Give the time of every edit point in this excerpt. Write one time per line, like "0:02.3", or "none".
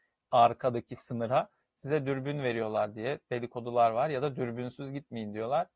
none